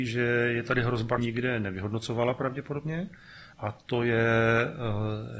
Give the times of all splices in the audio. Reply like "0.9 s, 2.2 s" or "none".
1.2 s, 3.5 s